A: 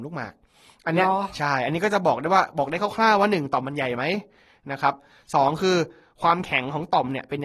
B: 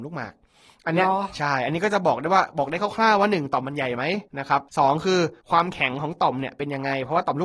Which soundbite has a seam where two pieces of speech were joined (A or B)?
B